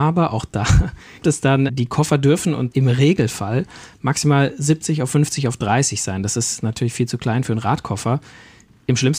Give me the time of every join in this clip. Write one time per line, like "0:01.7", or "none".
0:01.2
0:01.7
0:02.7